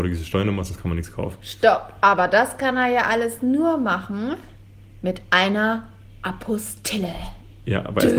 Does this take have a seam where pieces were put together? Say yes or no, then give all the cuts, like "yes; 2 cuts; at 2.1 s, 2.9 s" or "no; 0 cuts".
no; 0 cuts